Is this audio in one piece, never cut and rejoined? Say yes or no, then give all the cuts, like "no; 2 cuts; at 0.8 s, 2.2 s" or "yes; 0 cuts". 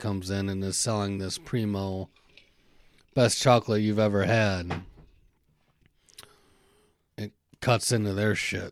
yes; 0 cuts